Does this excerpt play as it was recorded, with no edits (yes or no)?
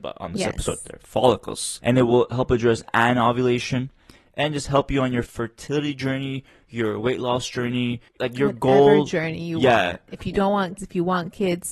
no